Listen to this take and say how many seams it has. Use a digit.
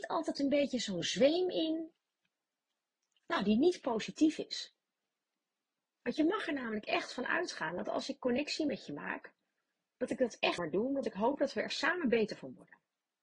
1